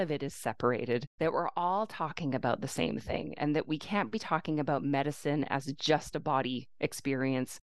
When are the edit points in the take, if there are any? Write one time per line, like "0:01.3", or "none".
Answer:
0:01.1